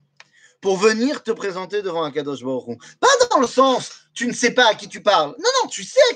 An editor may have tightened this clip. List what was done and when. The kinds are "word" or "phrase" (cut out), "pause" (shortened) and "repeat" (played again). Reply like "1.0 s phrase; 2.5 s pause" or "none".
none